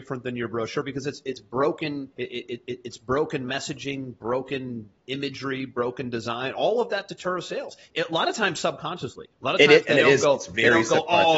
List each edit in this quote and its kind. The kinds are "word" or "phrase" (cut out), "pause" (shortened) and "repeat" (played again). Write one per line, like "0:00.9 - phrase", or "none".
0:02.1 - pause
0:09.3 - pause